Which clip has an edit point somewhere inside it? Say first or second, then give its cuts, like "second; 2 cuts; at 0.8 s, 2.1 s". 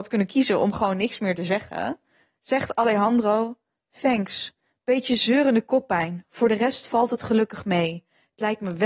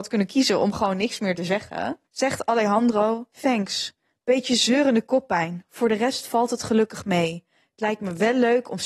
second; 2 cuts; at 2.1 s, 3.3 s